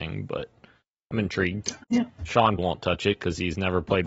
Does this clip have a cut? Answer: yes; 2 cuts; at 1.8 s, 2.6 s

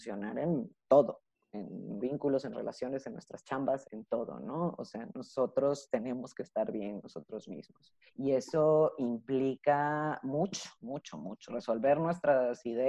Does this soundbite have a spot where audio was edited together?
yes; 7 cuts; at 2.0 s, 2.5 s, 3.8 s, 7.0 s, 8.1 s, 10.8 s, 11.5 s

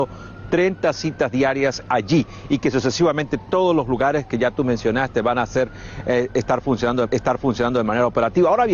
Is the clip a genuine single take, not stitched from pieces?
no; 1 cut; at 7.1 s

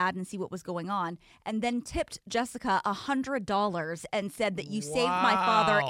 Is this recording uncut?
yes; 0 cuts

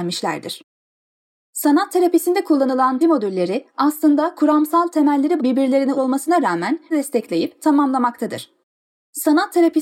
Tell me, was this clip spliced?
yes; 4 cuts; at 3.0 s, 5.4 s, 6.0 s, 6.9 s

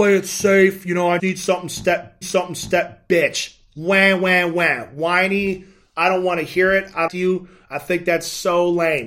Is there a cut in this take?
yes; 3 cuts; at 1.2 s, 2.2 s, 7.1 s

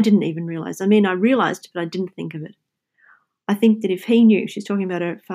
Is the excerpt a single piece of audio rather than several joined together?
yes; 0 cuts

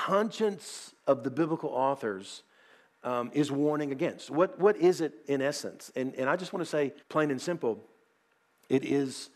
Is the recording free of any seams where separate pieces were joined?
no; 2 cuts; at 5.2 s, 7.0 s

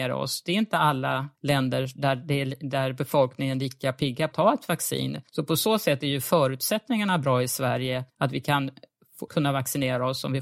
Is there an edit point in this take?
yes; 5 cuts; at 1.3 s, 4.3 s, 5.3 s, 8.1 s, 9.3 s

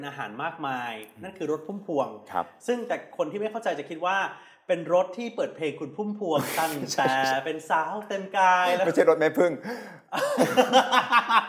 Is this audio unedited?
yes; 0 cuts

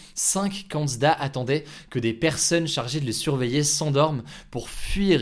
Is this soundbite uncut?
yes; 0 cuts

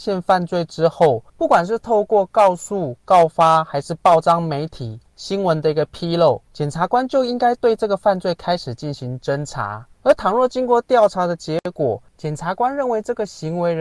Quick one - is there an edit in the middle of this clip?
yes; 5 cuts; at 1.3 s, 5.1 s, 6.5 s, 9.9 s, 12.1 s

